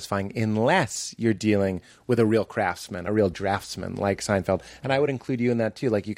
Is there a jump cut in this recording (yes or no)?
no